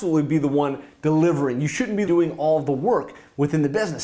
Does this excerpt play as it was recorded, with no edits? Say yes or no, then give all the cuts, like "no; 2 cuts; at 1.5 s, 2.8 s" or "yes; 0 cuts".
no; 1 cut; at 2.1 s